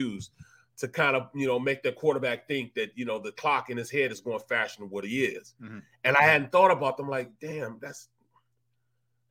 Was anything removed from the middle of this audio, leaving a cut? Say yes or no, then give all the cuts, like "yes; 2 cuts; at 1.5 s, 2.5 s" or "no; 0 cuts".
yes; 1 cut; at 5.0 s